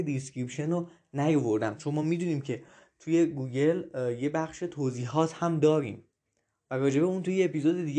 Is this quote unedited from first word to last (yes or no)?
yes